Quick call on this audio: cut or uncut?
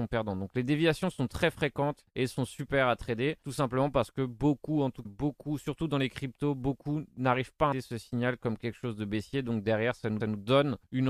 cut